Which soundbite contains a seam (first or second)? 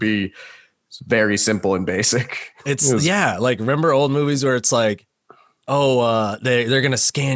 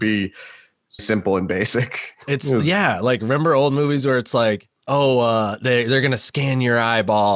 second